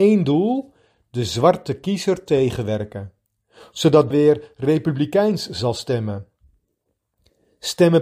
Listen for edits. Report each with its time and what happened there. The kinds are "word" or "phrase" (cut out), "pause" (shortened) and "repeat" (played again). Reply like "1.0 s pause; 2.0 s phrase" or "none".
4.1 s word